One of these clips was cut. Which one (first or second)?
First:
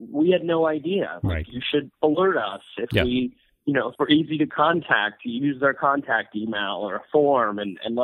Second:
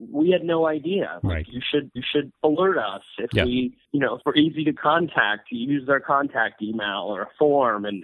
second